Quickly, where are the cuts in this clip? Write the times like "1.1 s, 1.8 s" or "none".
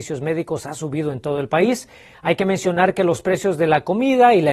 none